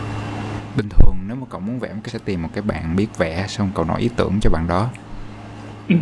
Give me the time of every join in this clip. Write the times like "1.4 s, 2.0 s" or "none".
2.1 s